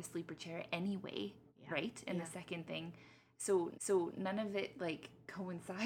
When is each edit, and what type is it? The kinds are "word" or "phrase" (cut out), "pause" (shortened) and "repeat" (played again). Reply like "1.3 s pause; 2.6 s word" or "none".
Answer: 1.5 s pause; 3.7 s repeat